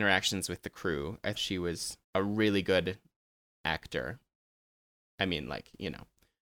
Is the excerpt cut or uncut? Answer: cut